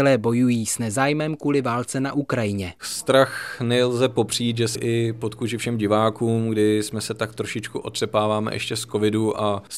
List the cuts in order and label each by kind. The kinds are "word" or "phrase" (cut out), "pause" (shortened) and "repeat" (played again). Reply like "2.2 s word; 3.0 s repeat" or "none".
4.7 s word